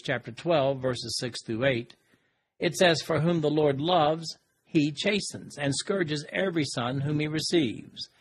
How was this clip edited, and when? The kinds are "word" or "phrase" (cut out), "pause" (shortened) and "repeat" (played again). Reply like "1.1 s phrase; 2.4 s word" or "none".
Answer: none